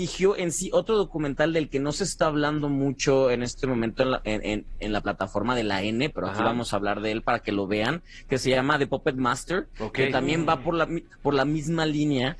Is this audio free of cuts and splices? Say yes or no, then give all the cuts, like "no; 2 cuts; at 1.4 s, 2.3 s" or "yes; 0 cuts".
yes; 0 cuts